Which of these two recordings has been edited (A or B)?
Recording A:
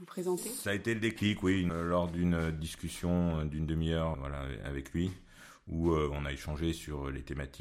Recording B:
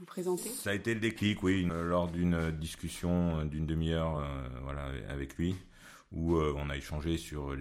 A